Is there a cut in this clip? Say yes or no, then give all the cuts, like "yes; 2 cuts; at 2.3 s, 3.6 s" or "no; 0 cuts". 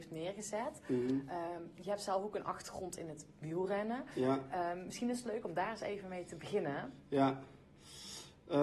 no; 0 cuts